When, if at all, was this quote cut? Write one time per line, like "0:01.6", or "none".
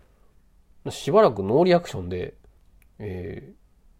0:02.6